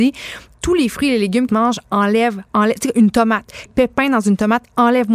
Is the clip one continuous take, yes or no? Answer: no